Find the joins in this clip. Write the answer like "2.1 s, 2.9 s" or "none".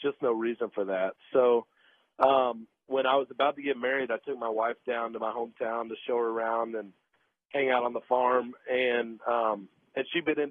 none